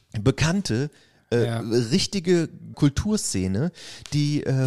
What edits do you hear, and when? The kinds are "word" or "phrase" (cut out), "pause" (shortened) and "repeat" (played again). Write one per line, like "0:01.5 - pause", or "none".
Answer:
0:02.7 - phrase